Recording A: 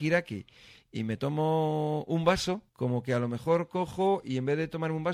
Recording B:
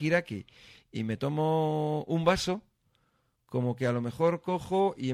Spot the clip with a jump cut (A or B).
A